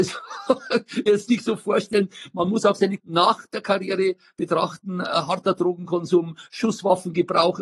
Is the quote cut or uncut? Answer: cut